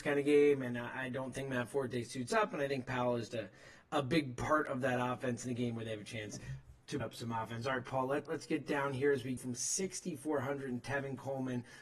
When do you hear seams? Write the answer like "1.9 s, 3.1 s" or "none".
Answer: 3.3 s, 7.0 s, 8.3 s, 9.4 s